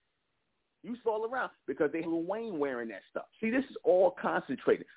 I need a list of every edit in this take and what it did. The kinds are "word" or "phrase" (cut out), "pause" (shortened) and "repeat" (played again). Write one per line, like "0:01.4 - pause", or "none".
0:01.0 - phrase
0:02.0 - word
0:03.3 - pause